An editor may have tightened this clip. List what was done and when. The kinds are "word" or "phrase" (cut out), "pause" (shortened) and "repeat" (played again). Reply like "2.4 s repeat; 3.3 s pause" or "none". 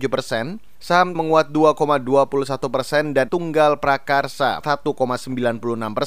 1.1 s phrase; 3.3 s word; 4.6 s word